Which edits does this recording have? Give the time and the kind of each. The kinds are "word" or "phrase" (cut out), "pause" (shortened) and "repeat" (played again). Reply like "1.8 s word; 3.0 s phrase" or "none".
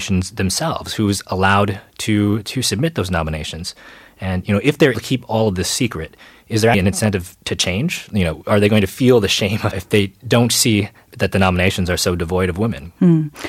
4.9 s word; 6.7 s word; 9.7 s phrase